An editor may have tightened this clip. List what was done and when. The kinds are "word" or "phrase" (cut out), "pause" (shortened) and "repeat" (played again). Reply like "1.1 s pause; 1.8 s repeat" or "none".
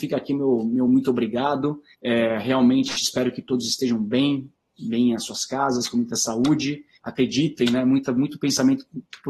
1.9 s pause; 6.9 s pause

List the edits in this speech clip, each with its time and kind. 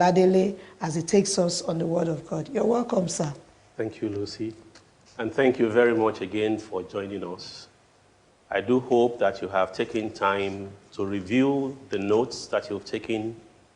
none

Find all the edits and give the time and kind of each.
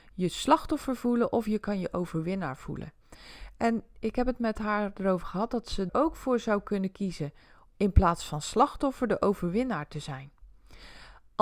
5.9 s word; 7.7 s word

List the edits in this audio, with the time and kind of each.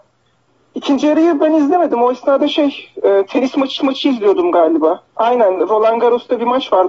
3.8 s repeat; 5.1 s pause

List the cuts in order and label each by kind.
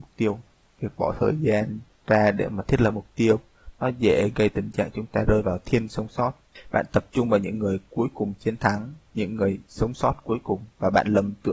5.9 s word; 9.1 s pause

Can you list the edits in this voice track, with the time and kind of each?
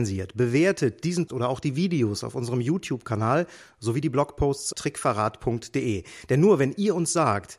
1.3 s word; 4.7 s word

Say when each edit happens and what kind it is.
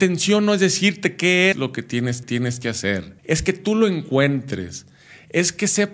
1.5 s word; 2.2 s repeat; 3.2 s pause

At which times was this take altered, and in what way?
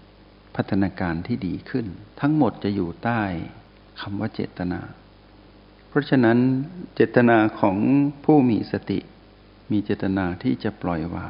2.1 s pause

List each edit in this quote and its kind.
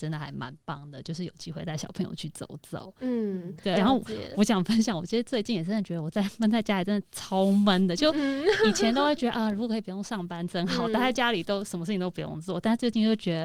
none

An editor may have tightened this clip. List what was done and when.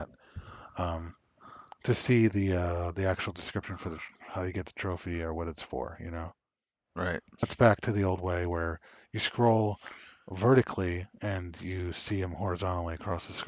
7.4 s word

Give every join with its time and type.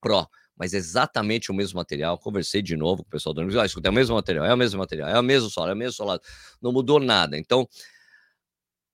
none

